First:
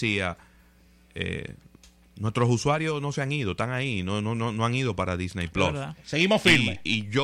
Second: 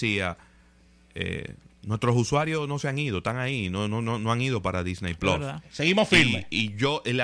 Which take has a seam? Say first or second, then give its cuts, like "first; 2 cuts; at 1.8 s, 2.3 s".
second; 1 cut; at 1.7 s